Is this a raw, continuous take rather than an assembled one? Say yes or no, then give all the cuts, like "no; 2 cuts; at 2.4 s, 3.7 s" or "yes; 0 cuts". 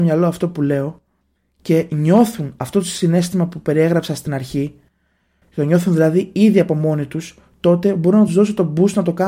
yes; 0 cuts